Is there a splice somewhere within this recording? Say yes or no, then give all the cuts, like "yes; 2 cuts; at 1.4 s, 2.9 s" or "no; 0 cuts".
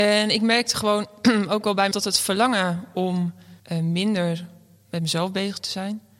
yes; 2 cuts; at 1.9 s, 3.6 s